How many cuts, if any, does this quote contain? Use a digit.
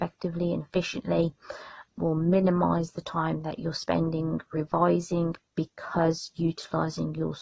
2